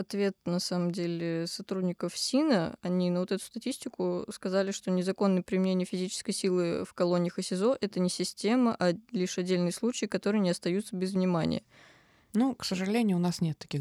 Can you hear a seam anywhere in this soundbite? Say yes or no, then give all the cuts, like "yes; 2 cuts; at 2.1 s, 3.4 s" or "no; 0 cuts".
no; 0 cuts